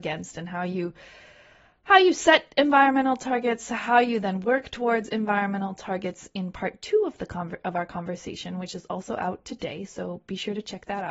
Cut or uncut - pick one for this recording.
uncut